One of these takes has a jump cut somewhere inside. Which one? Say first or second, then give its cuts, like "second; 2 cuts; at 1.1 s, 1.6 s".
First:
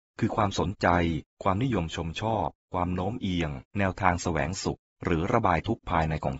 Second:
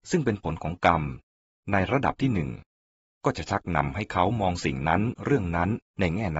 first; 1 cut; at 3.7 s